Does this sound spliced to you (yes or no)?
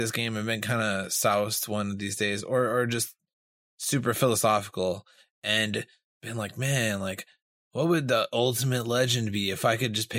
no